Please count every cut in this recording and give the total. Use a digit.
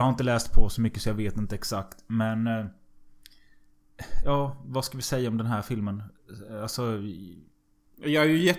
0